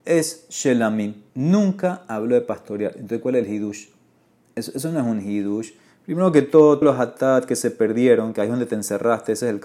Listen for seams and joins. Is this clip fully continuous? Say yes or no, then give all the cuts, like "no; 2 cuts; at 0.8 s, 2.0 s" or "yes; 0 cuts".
no; 2 cuts; at 1.3 s, 6.8 s